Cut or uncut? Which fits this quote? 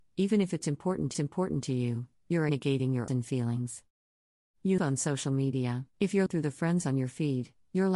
cut